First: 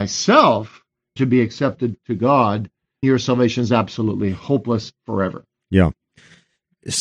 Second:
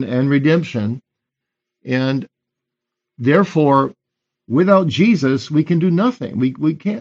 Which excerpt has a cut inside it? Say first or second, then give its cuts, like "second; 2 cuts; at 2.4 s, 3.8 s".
first; 2 cuts; at 1.2 s, 3.0 s